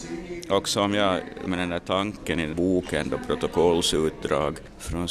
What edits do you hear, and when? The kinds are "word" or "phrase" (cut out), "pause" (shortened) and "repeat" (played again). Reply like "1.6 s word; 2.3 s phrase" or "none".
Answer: 1.5 s word; 2.5 s word